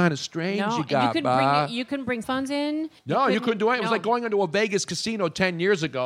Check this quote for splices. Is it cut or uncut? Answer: cut